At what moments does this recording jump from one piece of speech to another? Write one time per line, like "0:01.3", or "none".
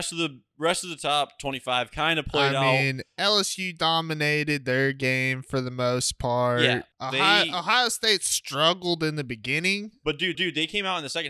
0:06.9
0:10.3